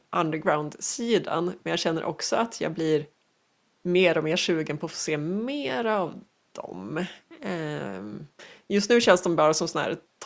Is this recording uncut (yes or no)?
yes